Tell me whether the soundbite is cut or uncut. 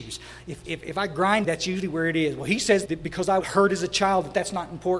cut